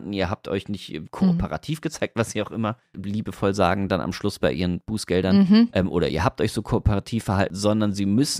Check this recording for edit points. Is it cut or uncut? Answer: uncut